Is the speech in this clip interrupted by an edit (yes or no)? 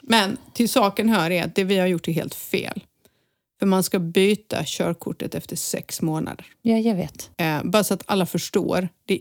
yes